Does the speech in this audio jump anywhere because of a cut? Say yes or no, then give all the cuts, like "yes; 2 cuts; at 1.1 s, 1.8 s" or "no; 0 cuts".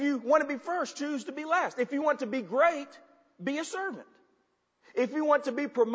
no; 0 cuts